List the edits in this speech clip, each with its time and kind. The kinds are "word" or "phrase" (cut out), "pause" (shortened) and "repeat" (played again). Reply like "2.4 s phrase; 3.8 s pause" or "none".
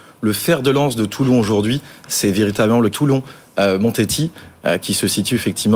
2.9 s word

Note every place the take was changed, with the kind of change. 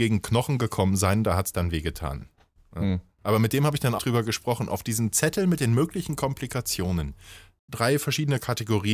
4.0 s word

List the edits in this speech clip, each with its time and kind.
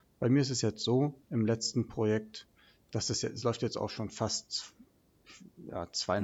1.2 s pause

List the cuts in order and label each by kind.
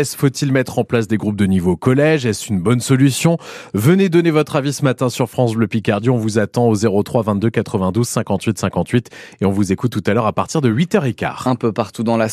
none

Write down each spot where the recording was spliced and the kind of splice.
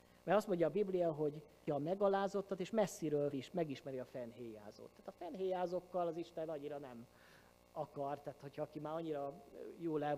1.7 s word; 3.3 s word

